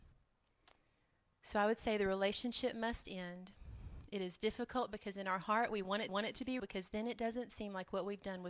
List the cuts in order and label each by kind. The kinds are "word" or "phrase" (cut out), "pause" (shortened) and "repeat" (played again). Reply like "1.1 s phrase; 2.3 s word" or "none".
6.1 s repeat; 6.6 s word